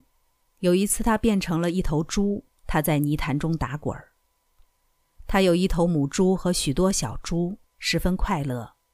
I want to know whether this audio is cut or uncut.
cut